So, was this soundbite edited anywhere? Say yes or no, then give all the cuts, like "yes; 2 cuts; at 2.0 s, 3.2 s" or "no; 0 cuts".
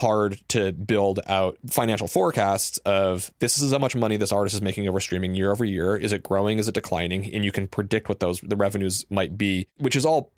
no; 0 cuts